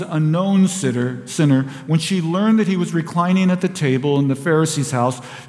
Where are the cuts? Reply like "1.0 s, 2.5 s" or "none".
none